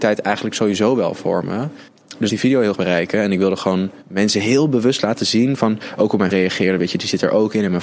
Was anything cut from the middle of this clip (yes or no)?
yes